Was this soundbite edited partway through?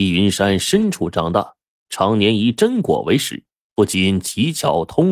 no; 0 cuts

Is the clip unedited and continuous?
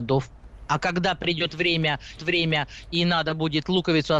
no; 1 cut; at 2.2 s

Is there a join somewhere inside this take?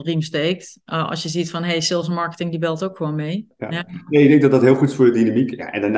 no; 0 cuts

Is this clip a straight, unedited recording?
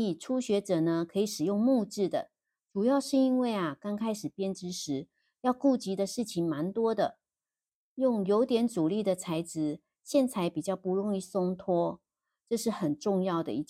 yes; 0 cuts

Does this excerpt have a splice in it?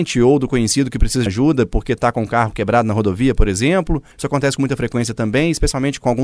yes; 1 cut; at 1.3 s

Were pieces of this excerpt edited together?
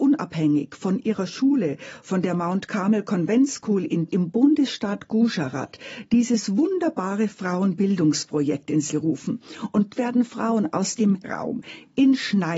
yes; 4 cuts; at 4.1 s, 8.9 s, 9.9 s, 11.2 s

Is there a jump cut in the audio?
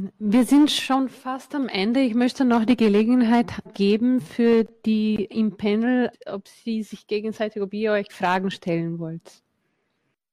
yes; 4 cuts; at 3.6 s, 5.3 s, 6.1 s, 8.1 s

